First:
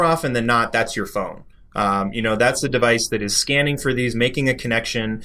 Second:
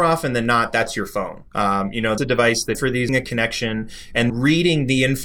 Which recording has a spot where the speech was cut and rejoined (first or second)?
second